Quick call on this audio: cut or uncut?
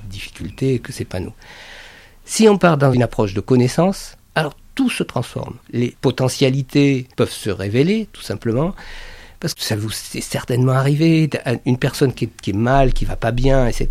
cut